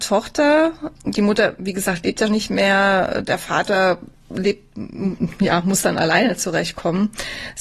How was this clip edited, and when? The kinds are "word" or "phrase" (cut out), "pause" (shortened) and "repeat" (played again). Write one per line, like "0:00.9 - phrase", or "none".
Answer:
0:02.3 - word
0:04.1 - pause